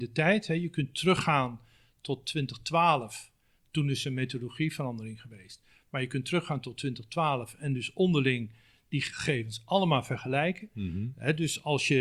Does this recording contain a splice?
no; 0 cuts

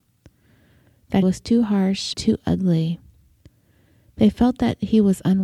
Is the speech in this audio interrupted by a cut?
yes; 2 cuts; at 1.2 s, 2.1 s

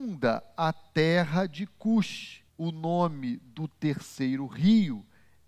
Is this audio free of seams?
no; 1 cut; at 2.5 s

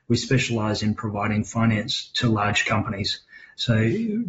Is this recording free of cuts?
yes; 0 cuts

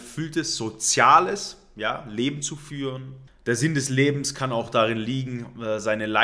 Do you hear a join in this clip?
no; 0 cuts

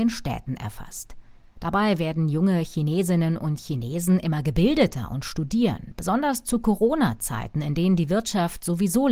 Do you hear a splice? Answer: no; 0 cuts

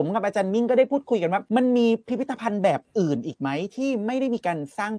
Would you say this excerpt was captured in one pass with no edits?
no; 1 cut; at 1.5 s

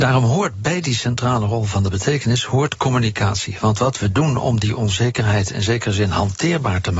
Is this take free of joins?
yes; 0 cuts

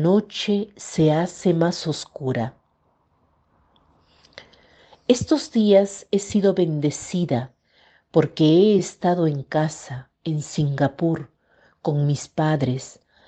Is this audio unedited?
yes; 0 cuts

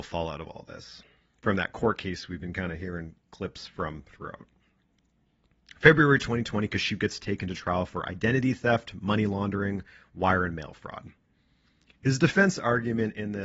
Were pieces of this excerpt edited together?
no; 0 cuts

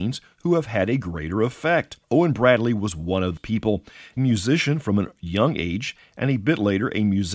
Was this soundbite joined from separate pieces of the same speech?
yes; 3 cuts; at 2.0 s, 3.4 s, 4.2 s

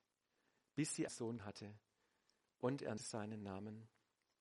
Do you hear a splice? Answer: yes; 3 cuts; at 1.1 s, 1.4 s, 3.0 s

